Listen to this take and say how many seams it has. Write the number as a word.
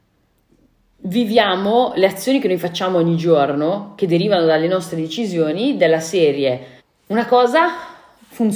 one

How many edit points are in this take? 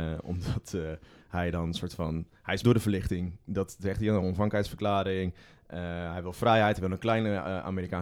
one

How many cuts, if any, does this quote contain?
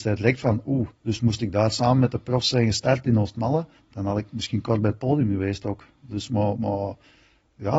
two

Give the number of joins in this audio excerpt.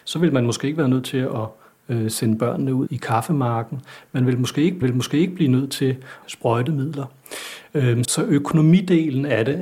four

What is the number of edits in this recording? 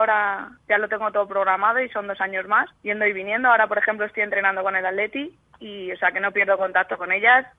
one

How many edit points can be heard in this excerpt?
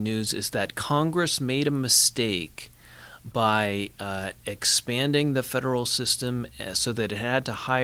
zero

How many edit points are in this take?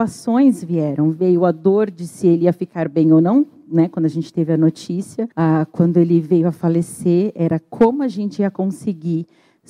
one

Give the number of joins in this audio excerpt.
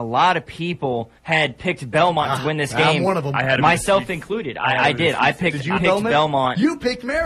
two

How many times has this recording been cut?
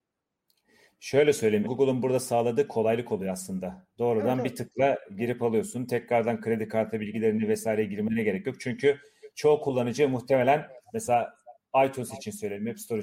one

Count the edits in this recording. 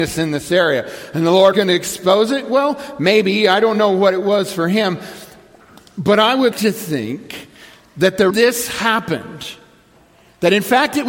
three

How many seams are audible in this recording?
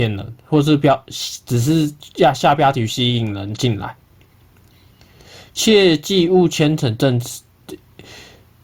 zero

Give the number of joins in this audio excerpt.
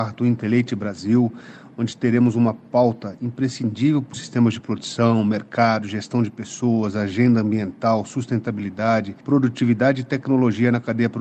two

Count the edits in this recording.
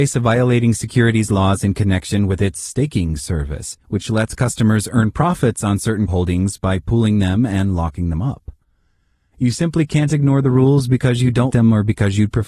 three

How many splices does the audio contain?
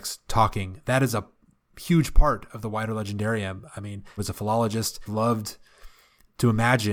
two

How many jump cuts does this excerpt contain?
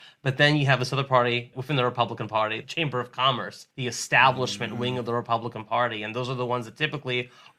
three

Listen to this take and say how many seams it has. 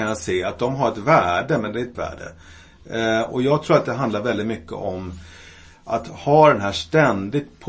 one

